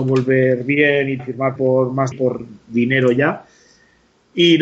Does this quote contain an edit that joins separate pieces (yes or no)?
yes